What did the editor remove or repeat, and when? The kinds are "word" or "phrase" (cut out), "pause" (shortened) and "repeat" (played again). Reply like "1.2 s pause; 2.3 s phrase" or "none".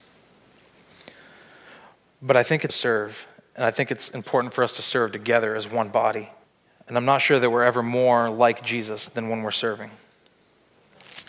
2.7 s phrase; 6.4 s pause

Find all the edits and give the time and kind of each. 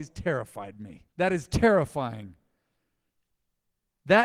1.1 s pause

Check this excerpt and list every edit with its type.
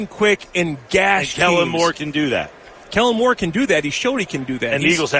none

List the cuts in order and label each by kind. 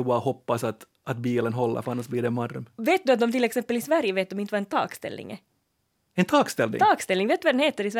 none

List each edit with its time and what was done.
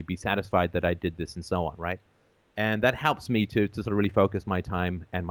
none

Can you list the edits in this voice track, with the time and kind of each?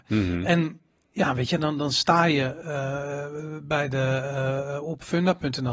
none

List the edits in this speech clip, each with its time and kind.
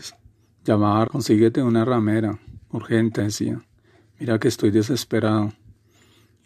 1.1 s word; 3.2 s word

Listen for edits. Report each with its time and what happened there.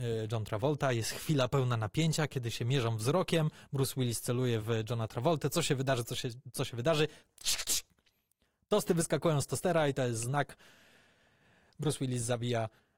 none

